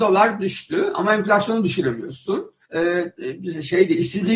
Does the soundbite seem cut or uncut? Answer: cut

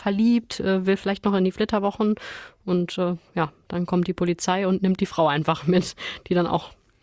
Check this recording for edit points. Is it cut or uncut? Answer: uncut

